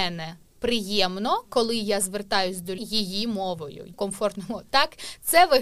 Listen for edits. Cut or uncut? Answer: cut